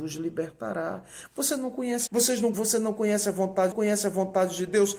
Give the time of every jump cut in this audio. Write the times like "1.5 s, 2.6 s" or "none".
2.1 s, 2.5 s, 3.7 s